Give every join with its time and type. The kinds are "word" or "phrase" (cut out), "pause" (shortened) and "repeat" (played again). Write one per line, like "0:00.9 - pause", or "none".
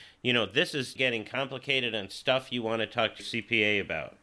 0:01.0 - word
0:03.2 - word